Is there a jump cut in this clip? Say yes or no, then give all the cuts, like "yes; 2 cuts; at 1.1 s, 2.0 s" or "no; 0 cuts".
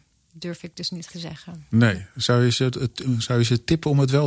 yes; 1 cut; at 1.1 s